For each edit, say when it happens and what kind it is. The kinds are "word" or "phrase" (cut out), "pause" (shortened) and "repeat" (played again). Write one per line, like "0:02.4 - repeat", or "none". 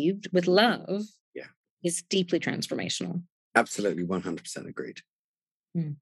none